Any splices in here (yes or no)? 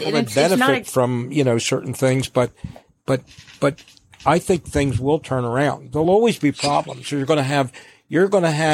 no